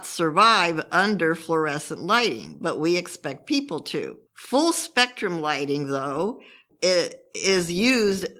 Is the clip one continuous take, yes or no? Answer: no